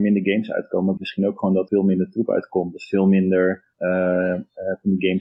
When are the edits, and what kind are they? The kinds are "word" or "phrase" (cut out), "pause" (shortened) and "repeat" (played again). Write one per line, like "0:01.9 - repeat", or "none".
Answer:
0:01.0 - word
0:01.7 - word
0:03.7 - pause

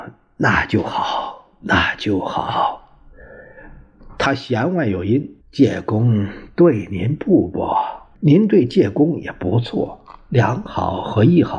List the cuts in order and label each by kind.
0:05.4 - pause
0:08.1 - pause

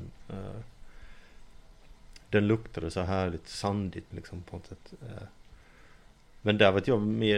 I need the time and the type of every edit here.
0:04.1 - word

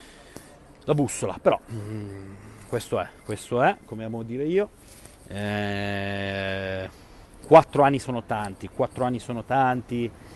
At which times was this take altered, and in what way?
0:03.2 - pause

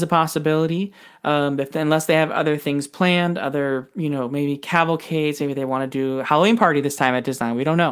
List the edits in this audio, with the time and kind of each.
none

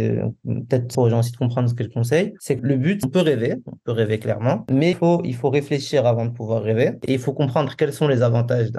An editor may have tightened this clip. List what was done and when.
0:00.9 - word
0:02.6 - word
0:04.9 - word

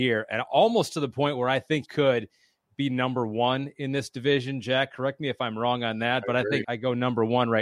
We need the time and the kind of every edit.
0:01.8 - word
0:06.6 - word

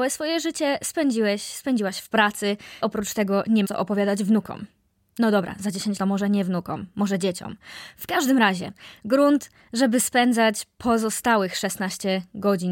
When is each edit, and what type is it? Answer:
0:02.8 - word
0:03.6 - word
0:06.0 - word

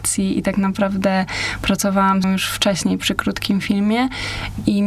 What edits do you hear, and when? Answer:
0:02.2 - word

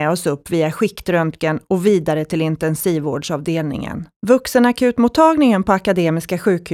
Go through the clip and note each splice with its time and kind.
0:04.2 - pause

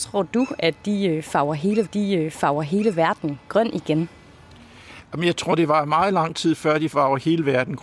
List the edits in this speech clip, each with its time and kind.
0:01.9 - repeat

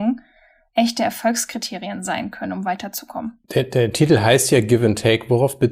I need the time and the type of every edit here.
0:03.4 - pause

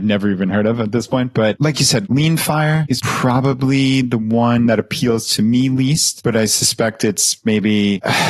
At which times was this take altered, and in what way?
none

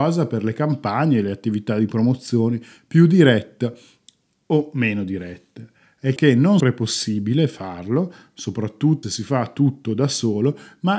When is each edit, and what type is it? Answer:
0:06.2 - word
0:06.6 - word
0:09.0 - word

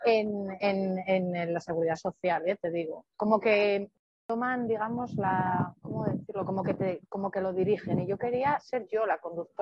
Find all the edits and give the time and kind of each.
none

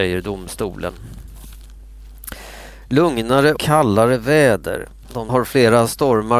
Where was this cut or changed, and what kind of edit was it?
0:03.6 - word
0:05.3 - phrase

